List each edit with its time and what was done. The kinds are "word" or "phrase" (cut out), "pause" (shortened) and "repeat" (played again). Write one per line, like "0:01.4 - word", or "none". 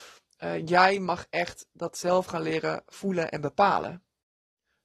none

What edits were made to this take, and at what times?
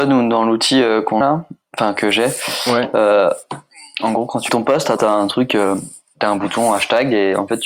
0:01.2 - word
0:04.5 - word
0:05.0 - word

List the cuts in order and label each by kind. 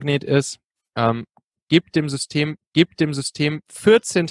0:02.6 - repeat

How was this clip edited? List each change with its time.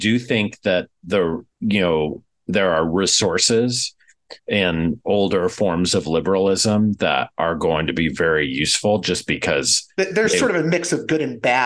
0:01.5 - pause
0:04.4 - pause

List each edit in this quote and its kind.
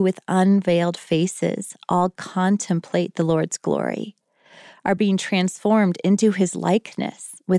none

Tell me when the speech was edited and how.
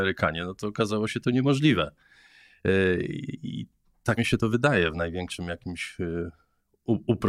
0:04.2 - word

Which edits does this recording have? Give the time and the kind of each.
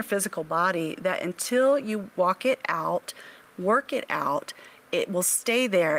none

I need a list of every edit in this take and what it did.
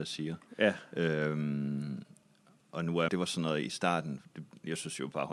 0:02.6 - word
0:03.1 - phrase

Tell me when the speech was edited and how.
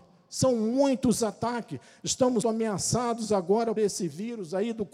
0:02.4 - word
0:03.8 - word

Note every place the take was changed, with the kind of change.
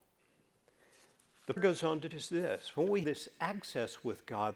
0:01.6 - word
0:02.1 - word
0:03.0 - word

